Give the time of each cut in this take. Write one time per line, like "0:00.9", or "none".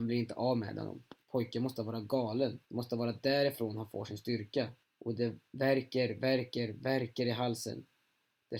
0:01.2
0:02.6
0:04.8
0:05.5